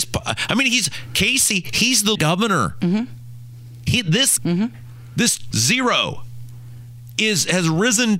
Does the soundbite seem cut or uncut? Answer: cut